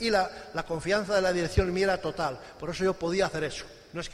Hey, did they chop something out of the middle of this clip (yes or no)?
no